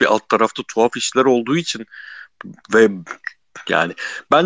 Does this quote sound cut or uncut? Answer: uncut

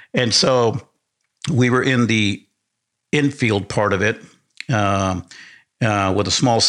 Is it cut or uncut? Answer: uncut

